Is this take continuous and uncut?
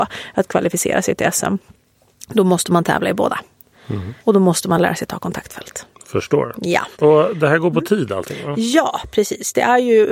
no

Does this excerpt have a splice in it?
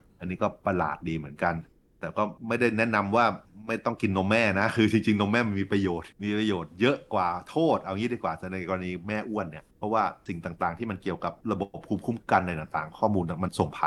yes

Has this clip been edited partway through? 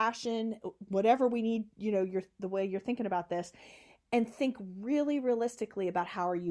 no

